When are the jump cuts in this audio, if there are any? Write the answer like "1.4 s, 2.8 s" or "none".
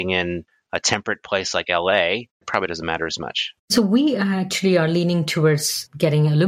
3.6 s